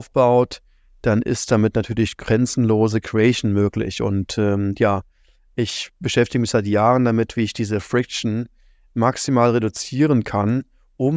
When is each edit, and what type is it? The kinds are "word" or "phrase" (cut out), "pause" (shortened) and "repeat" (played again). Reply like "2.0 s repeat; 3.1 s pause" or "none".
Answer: none